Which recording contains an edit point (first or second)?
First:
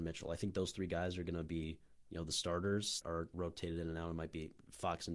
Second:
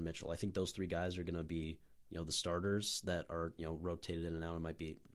first